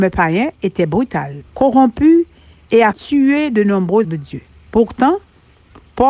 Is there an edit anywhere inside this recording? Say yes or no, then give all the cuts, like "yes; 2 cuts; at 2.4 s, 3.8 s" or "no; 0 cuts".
yes; 4 cuts; at 1.5 s, 2.9 s, 4.0 s, 4.5 s